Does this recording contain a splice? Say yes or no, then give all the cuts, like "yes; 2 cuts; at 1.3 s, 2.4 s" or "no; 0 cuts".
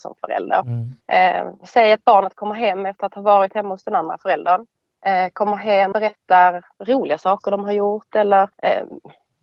yes; 5 cuts; at 1.0 s, 4.8 s, 5.9 s, 6.7 s, 8.5 s